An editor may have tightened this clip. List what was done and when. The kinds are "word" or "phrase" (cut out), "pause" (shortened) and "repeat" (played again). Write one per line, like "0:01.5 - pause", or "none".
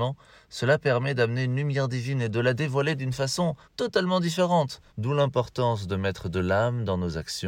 0:03.6 - pause
0:04.9 - pause